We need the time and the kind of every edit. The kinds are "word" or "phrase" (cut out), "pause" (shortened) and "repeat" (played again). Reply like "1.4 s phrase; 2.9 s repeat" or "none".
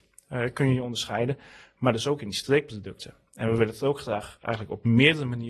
none